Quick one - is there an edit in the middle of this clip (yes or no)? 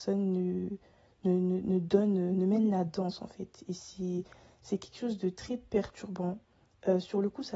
no